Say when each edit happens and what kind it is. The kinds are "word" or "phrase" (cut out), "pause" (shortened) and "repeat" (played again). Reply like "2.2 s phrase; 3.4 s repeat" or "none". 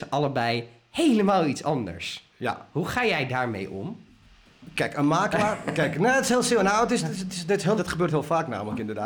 7.8 s phrase